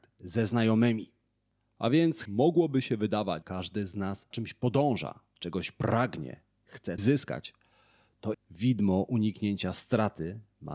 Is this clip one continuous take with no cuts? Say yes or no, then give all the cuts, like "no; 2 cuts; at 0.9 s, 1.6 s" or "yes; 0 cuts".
no; 5 cuts; at 2.3 s, 3.4 s, 4.3 s, 7.0 s, 8.3 s